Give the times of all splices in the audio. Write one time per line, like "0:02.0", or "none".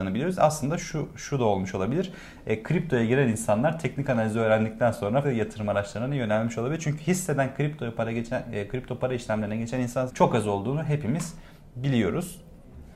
0:05.2
0:10.1